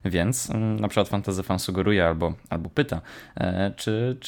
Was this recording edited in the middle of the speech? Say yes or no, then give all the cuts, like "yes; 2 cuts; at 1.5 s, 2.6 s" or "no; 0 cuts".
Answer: no; 0 cuts